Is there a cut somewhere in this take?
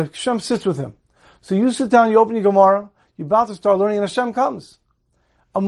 no; 0 cuts

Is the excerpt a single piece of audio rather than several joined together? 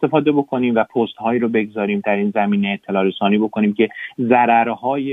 yes; 0 cuts

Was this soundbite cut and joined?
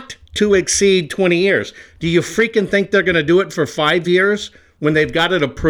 no; 0 cuts

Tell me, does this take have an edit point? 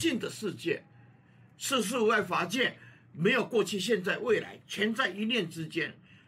no; 0 cuts

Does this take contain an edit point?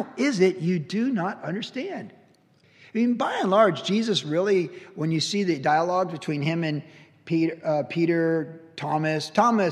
no; 0 cuts

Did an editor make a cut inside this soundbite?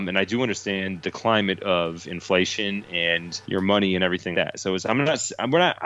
yes; 2 cuts; at 3.4 s, 4.3 s

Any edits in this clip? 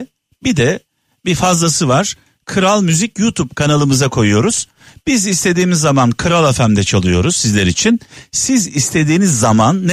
no; 0 cuts

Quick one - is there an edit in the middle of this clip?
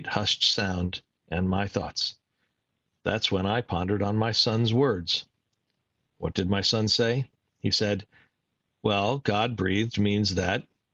no; 0 cuts

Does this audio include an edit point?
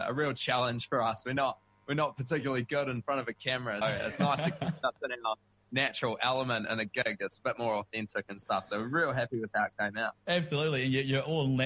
yes; 2 cuts; at 3.8 s, 10.2 s

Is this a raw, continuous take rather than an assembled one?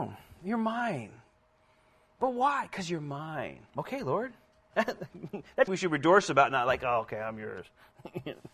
no; 2 cuts; at 3.7 s, 5.7 s

